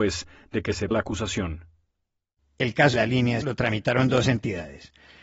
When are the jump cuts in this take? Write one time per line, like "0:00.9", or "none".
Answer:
0:00.9
0:02.9
0:03.4